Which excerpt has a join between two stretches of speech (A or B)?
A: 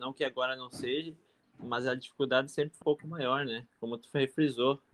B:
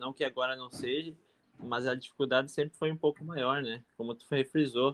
A